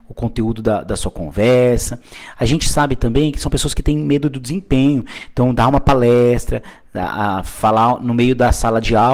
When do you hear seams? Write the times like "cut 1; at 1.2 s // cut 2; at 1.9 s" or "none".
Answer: none